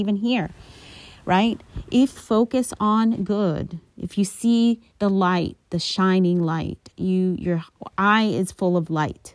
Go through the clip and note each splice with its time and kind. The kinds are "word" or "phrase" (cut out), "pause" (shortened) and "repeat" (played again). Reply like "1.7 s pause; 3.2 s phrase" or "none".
2.1 s word; 4.9 s pause

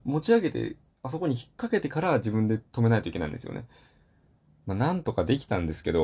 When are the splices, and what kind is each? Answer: 2.7 s pause

